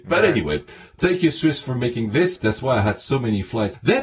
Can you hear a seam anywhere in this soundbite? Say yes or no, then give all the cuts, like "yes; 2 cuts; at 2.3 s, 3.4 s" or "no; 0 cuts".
no; 0 cuts